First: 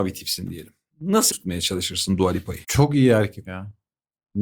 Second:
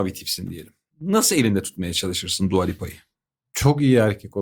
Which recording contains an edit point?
first; 3 cuts; at 1.3 s, 2.6 s, 3.4 s

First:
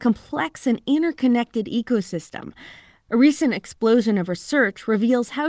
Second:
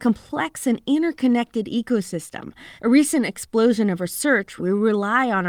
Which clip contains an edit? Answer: second; 2 cuts; at 2.8 s, 4.6 s

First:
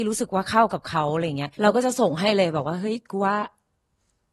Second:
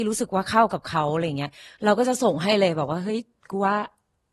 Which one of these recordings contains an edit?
first; 2 cuts; at 1.5 s, 3.0 s

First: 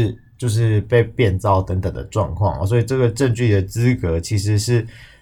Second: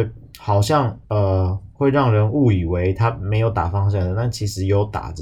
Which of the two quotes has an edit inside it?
second; 1 cut; at 1.0 s

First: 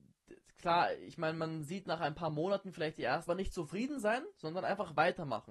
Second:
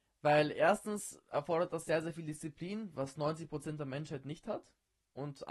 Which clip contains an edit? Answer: first; 1 cut; at 3.3 s

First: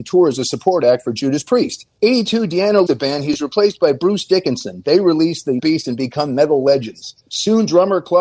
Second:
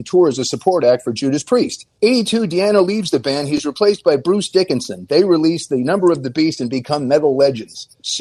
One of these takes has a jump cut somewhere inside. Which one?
first; 2 cuts; at 2.9 s, 5.6 s

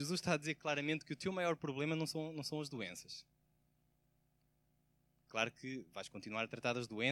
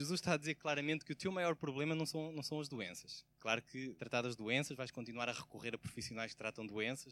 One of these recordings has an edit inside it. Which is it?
second; 2 cuts; at 3.3 s, 4.0 s

